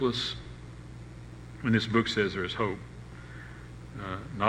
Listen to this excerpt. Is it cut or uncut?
uncut